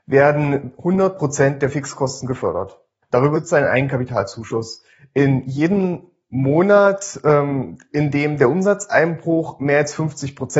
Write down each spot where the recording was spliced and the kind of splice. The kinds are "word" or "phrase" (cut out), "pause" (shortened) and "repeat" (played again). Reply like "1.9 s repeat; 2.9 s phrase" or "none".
3.3 s word